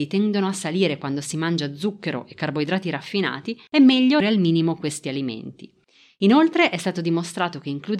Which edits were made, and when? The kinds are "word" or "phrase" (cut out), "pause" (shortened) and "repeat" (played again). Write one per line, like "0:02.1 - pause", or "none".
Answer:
0:03.7 - pause
0:04.2 - word